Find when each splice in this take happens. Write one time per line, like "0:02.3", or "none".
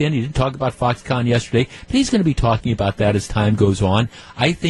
none